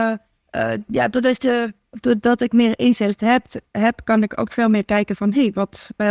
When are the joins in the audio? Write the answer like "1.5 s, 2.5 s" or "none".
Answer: none